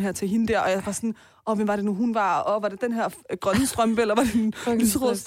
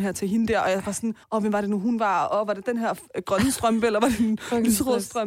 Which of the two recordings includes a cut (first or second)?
second